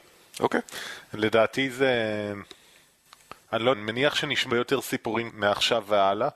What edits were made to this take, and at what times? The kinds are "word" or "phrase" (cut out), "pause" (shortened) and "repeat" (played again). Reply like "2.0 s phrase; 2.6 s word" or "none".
3.7 s word; 4.5 s word; 5.3 s word